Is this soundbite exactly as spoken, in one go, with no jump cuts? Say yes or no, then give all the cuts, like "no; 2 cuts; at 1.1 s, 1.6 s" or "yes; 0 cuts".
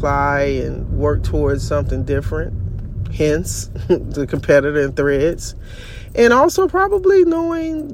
yes; 0 cuts